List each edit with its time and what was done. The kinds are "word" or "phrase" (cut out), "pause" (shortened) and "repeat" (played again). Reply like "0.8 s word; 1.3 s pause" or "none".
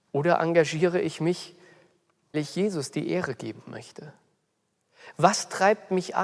2.3 s word

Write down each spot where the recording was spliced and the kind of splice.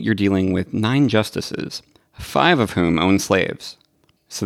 none

